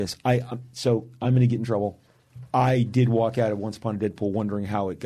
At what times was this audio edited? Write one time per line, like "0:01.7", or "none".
none